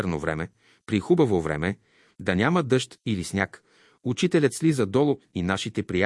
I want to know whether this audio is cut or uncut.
uncut